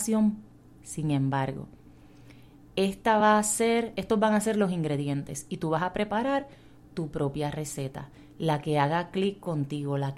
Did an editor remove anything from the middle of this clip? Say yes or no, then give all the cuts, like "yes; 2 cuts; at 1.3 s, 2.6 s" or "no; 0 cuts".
no; 0 cuts